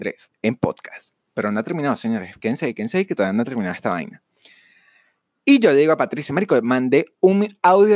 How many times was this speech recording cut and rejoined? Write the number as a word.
zero